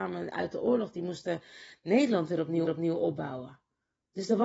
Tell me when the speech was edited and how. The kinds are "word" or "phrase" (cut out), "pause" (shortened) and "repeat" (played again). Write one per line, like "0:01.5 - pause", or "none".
0:02.7 - repeat